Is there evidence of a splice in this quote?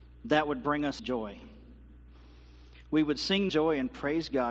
yes; 2 cuts; at 1.0 s, 3.5 s

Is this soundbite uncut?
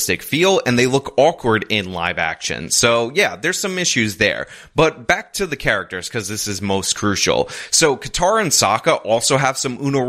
yes; 0 cuts

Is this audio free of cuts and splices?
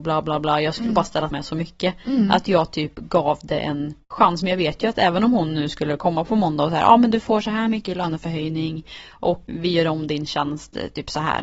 no; 2 cuts; at 1.3 s, 9.5 s

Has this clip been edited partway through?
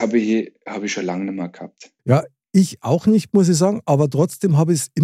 yes; 1 cut; at 2.0 s

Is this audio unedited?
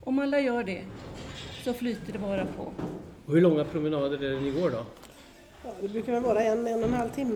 yes; 0 cuts

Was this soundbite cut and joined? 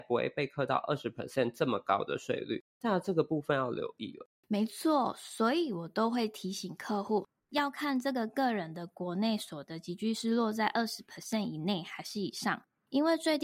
no; 0 cuts

